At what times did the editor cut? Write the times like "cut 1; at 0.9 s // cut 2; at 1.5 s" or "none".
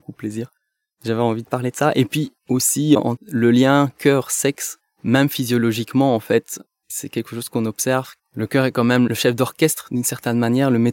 cut 1; at 2.4 s // cut 2; at 3.2 s